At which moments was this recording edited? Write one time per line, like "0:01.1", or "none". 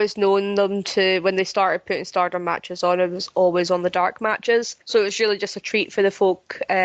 0:04.8